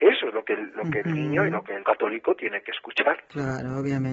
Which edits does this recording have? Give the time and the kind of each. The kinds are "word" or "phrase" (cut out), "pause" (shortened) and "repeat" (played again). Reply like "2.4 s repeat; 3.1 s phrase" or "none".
1.8 s word

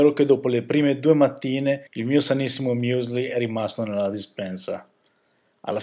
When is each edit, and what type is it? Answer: 1.9 s pause

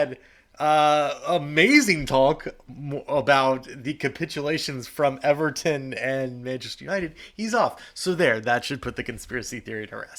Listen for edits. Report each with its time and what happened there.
none

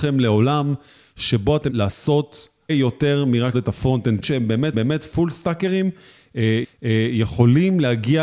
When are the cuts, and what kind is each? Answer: 1.7 s word; 2.7 s word; 3.5 s word; 4.2 s phrase; 4.7 s repeat; 6.6 s repeat

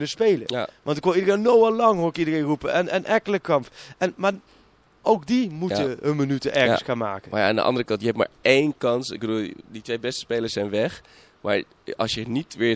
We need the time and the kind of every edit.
none

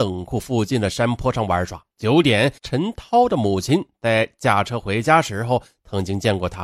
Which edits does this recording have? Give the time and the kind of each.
1.9 s pause; 2.6 s pause

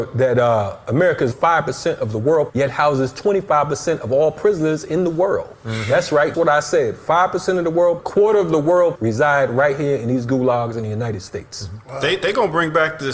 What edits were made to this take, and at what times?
1.3 s word; 2.5 s word; 6.3 s word; 8.0 s phrase; 8.9 s word

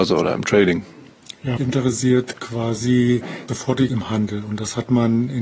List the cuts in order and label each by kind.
1.6 s word; 3.5 s word; 3.9 s word

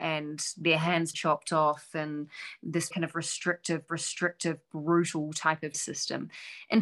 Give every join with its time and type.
1.1 s word; 2.9 s word; 3.9 s repeat; 5.7 s word

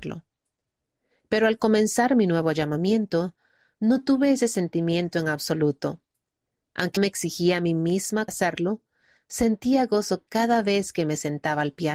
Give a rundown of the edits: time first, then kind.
7.0 s word; 8.3 s phrase

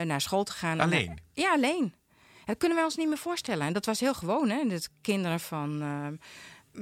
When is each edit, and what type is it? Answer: none

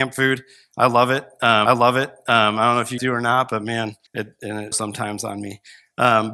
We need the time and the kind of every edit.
1.7 s repeat; 3.0 s word; 4.1 s pause; 4.7 s word

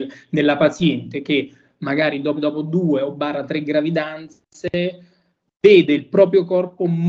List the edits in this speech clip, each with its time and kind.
2.4 s word

